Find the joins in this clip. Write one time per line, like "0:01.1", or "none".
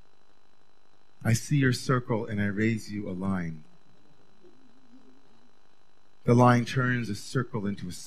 none